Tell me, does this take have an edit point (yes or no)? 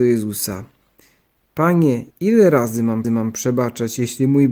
yes